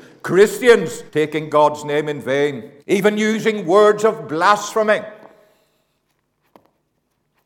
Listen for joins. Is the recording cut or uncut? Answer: cut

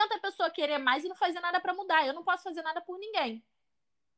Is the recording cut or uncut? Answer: uncut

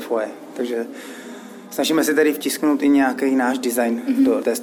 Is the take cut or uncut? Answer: uncut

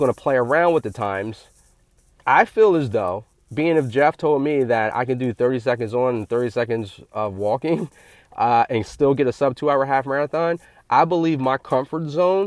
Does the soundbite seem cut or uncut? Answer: uncut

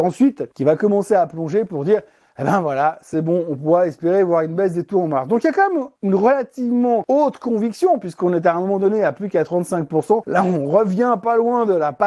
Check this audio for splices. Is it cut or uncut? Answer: uncut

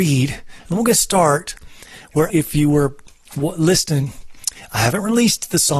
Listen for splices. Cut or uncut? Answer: cut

